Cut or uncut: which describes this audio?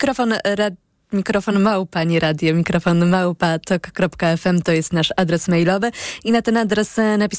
uncut